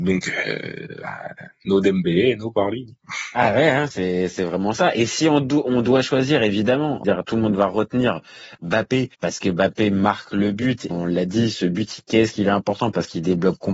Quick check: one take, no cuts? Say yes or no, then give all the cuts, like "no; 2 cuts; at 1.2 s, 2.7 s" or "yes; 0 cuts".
no; 3 cuts; at 7.0 s, 9.1 s, 10.9 s